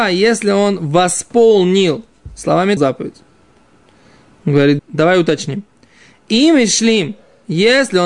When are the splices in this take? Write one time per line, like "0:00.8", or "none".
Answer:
0:02.8
0:04.8